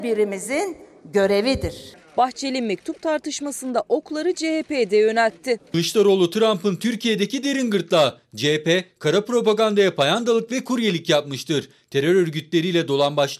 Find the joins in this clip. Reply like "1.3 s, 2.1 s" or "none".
none